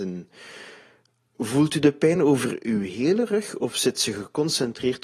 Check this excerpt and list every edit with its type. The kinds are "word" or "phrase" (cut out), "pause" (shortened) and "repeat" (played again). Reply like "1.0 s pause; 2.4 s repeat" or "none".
none